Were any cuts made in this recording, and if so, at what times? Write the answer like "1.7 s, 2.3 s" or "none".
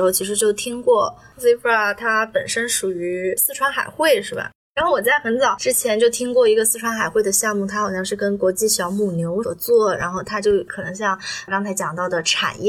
4.6 s, 11.5 s